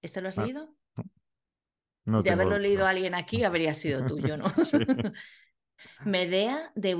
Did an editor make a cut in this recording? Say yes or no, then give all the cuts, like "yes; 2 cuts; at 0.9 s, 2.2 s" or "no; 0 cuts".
no; 0 cuts